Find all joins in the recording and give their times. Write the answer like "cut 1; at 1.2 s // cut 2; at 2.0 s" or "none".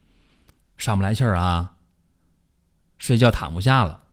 none